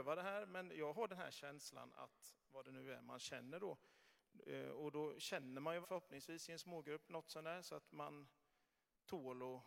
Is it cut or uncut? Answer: cut